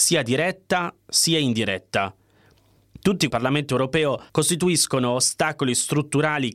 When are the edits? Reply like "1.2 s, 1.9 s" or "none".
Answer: 3.3 s, 4.3 s